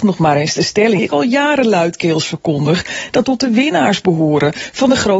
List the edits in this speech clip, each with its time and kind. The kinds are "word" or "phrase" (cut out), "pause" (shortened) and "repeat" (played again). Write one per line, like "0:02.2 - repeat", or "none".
0:01.0 - word
0:03.2 - word